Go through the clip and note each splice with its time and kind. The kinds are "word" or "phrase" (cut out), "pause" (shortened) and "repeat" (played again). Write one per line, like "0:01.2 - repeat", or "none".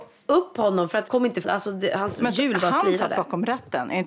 0:01.1 - word
0:01.4 - word